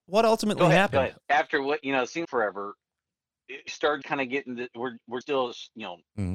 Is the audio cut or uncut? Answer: cut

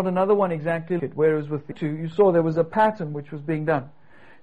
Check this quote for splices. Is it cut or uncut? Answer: cut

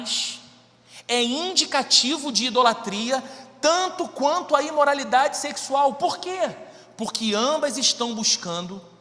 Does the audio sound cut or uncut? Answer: uncut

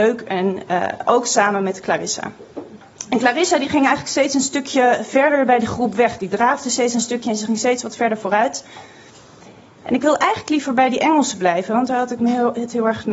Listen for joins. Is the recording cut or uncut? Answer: uncut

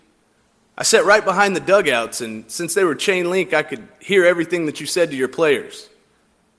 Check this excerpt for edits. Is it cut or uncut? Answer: uncut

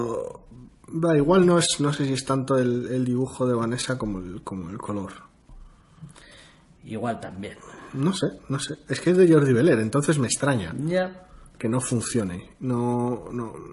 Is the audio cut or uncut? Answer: uncut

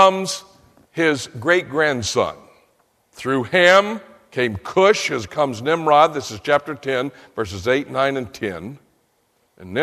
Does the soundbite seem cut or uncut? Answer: cut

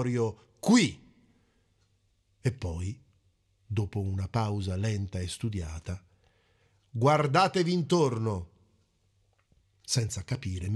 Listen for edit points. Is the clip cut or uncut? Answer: uncut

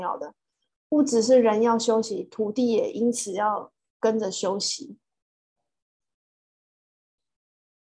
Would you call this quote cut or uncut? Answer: uncut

